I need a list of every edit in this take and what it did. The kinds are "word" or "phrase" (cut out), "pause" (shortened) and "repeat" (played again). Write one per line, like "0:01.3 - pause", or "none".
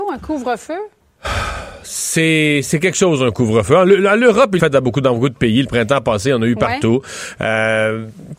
0:04.6 - word